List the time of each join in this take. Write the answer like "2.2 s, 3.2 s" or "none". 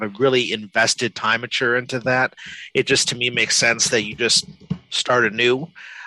none